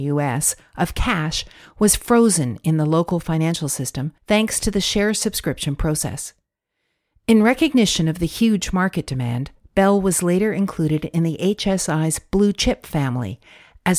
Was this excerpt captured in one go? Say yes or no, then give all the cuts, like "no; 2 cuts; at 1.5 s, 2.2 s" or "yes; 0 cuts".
no; 1 cut; at 4.2 s